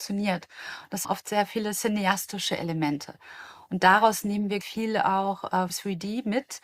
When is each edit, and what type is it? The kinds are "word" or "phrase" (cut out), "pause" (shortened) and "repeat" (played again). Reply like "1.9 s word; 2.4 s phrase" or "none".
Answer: 1.0 s word; 4.6 s word; 5.7 s phrase

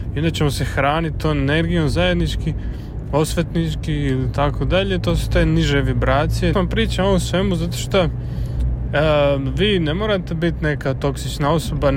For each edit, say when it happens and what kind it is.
6.5 s phrase

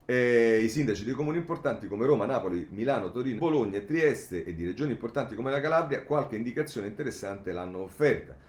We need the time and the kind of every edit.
3.4 s word

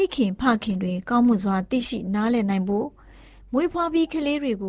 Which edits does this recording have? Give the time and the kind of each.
none

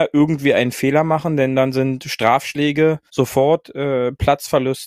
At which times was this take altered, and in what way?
3.1 s pause

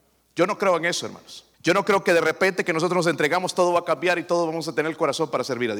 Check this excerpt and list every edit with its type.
1.5 s pause

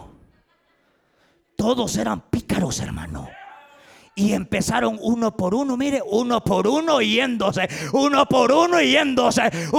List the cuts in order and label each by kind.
none

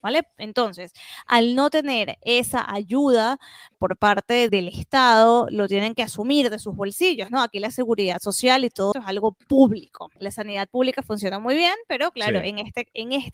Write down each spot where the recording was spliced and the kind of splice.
3.7 s word; 4.5 s word; 8.9 s word; 10.2 s pause

